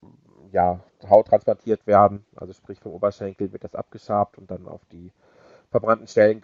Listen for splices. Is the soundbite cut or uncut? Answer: uncut